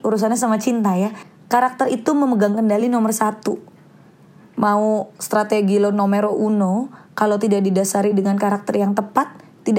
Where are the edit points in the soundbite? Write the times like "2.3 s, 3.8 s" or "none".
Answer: none

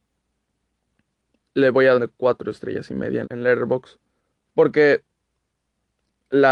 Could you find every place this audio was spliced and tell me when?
1.9 s, 3.2 s, 4.2 s

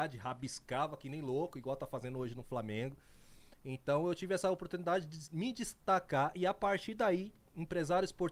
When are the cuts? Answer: none

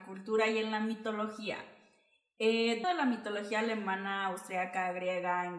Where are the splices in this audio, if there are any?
2.8 s

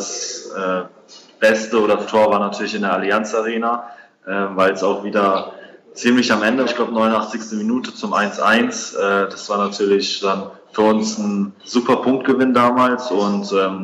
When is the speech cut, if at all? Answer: 2.1 s, 6.7 s, 11.6 s

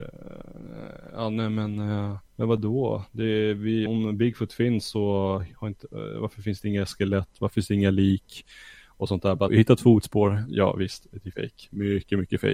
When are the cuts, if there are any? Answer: 2.3 s, 3.9 s, 9.5 s, 11.3 s

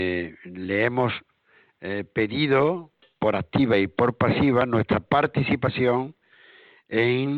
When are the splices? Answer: none

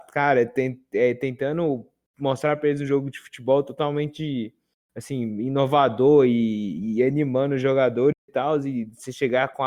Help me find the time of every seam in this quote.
none

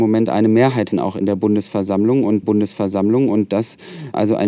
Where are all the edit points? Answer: 0.9 s, 2.4 s

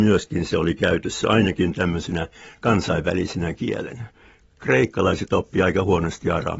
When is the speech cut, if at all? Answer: none

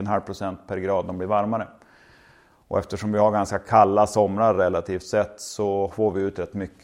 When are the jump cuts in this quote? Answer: none

